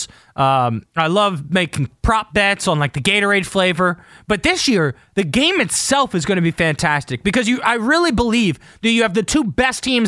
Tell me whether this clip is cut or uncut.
uncut